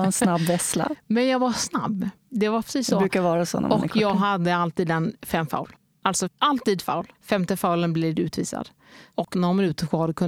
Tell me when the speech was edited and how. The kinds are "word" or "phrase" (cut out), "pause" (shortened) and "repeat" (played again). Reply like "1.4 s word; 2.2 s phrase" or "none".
6.8 s word; 7.1 s pause